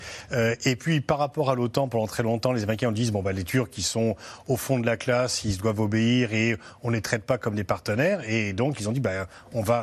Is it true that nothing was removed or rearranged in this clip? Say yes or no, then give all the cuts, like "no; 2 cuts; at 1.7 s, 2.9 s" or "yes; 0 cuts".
yes; 0 cuts